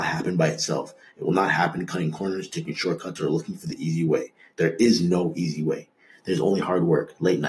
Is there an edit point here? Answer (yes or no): no